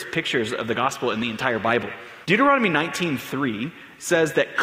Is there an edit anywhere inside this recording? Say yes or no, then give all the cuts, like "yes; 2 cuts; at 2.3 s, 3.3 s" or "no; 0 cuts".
yes; 1 cut; at 2.2 s